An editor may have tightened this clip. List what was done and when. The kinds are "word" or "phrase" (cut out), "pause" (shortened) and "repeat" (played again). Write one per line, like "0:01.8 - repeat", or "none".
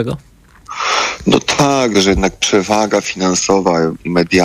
0:01.9 - word